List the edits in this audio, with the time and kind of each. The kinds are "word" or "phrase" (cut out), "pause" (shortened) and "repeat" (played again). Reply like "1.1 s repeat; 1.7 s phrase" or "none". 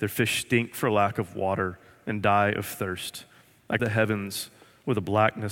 3.8 s word